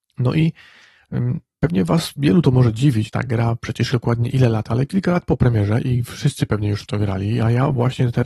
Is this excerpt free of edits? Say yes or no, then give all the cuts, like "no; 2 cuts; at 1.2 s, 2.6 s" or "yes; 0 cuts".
no; 2 cuts; at 3.1 s, 3.9 s